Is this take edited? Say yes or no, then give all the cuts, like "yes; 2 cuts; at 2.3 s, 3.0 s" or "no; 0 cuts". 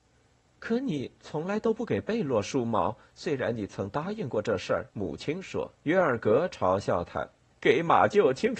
yes; 3 cuts; at 4.9 s, 5.7 s, 7.5 s